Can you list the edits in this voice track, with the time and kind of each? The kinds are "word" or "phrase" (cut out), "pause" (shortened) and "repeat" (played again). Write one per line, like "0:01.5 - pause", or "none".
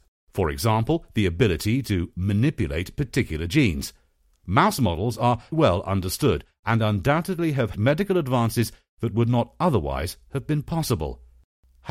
0:05.5 - word
0:07.7 - phrase